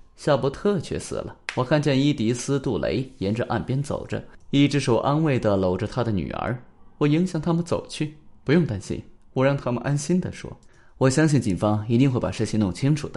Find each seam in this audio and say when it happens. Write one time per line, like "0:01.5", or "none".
0:01.4
0:08.4
0:09.2
0:10.6